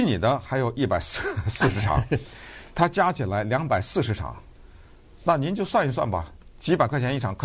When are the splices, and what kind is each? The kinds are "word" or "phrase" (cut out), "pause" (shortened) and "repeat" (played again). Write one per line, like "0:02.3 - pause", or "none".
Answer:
none